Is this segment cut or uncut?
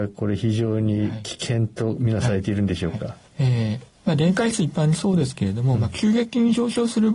cut